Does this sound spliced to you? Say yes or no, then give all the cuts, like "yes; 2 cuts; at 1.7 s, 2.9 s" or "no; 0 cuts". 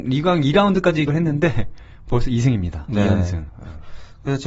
yes; 1 cut; at 1.1 s